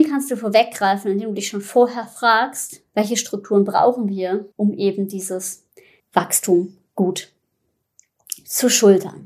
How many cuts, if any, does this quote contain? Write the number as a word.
three